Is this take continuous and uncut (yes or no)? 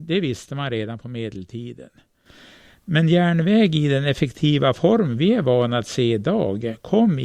yes